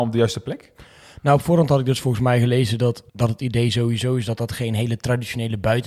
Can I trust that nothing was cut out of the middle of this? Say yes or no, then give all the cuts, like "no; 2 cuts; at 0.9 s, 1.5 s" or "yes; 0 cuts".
no; 1 cut; at 3.1 s